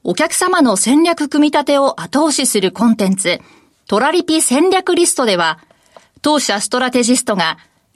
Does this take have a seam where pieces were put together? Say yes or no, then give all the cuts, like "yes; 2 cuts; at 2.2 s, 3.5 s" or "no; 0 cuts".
no; 0 cuts